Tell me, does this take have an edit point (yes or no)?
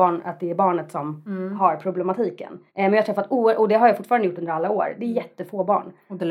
yes